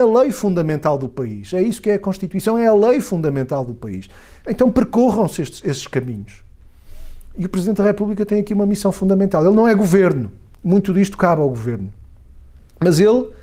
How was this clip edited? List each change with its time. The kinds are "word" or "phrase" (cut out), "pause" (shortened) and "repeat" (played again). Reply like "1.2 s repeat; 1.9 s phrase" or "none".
none